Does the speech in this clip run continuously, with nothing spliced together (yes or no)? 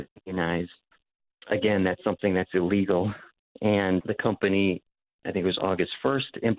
yes